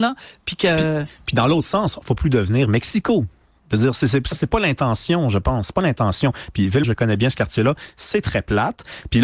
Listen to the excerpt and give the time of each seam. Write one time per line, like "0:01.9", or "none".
0:02.2
0:04.3
0:06.8